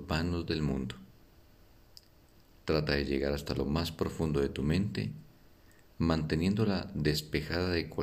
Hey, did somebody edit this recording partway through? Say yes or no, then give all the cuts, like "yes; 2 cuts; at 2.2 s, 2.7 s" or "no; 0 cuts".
no; 0 cuts